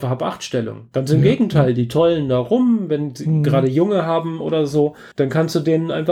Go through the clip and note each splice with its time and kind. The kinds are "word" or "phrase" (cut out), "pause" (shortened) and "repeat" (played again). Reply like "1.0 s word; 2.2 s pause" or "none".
5.1 s pause

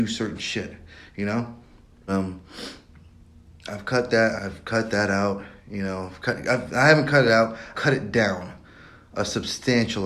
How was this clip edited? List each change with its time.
2.1 s word; 4.4 s word; 7.7 s word

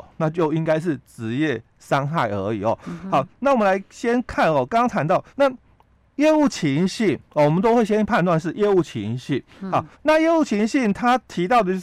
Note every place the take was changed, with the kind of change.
5.3 s pause; 9.9 s pause

